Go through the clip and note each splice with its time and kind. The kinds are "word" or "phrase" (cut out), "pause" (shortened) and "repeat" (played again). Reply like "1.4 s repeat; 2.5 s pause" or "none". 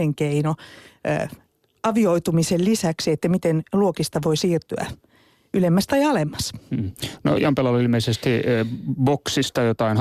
none